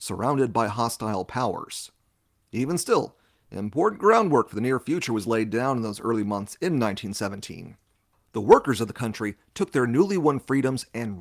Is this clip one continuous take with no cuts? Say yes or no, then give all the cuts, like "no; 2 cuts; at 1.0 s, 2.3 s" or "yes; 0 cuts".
yes; 0 cuts